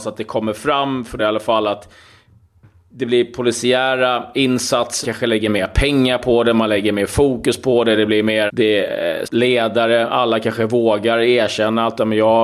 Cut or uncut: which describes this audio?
cut